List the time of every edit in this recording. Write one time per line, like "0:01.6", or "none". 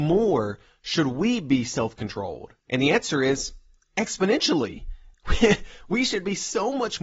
0:02.6